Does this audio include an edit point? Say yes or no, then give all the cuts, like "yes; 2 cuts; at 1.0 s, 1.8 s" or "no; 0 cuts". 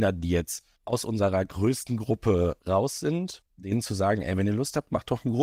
yes; 1 cut; at 3.5 s